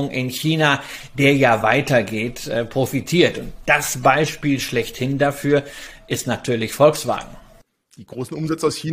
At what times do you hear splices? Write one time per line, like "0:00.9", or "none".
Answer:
none

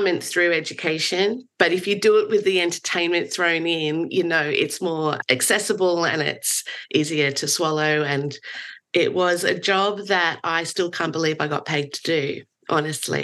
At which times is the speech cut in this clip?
none

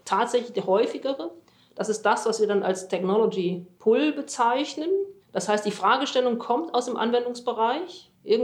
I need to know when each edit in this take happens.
0:05.2

